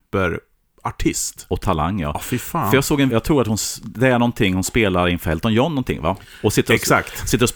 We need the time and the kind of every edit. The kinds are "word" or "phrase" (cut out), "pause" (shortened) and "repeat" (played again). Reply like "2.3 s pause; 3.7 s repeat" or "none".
3.1 s word